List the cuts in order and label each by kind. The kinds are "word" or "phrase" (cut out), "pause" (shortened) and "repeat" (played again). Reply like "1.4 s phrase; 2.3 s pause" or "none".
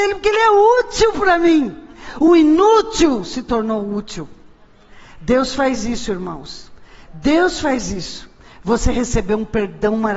none